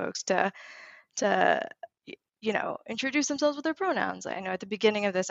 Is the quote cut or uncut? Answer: uncut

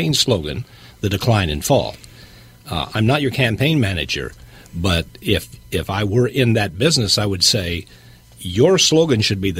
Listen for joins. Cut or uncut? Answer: uncut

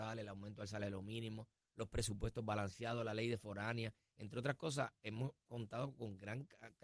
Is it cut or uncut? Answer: uncut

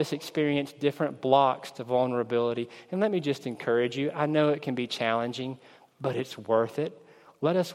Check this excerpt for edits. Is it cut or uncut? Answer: uncut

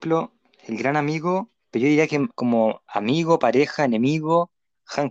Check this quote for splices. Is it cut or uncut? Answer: cut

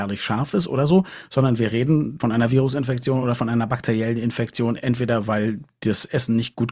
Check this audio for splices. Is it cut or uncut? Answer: uncut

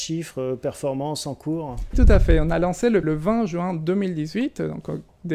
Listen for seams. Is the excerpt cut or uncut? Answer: cut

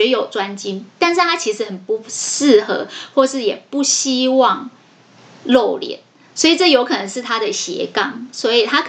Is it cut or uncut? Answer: uncut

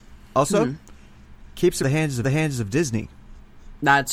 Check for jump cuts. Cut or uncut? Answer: cut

